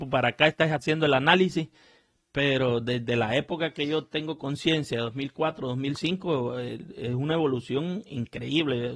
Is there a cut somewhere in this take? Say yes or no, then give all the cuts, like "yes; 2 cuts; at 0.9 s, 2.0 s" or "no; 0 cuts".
no; 0 cuts